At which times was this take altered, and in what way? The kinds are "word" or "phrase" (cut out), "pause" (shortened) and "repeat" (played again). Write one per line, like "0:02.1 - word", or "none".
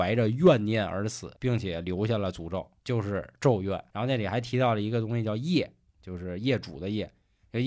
0:01.3 - pause
0:02.8 - pause
0:03.9 - pause